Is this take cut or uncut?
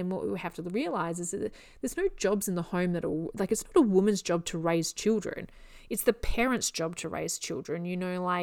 uncut